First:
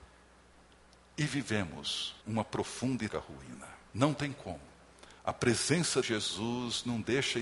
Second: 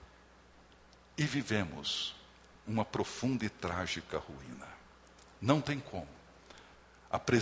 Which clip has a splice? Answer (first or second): first